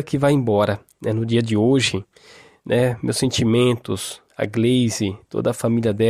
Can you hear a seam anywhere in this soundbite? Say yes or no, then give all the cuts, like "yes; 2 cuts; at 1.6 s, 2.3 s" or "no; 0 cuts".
no; 0 cuts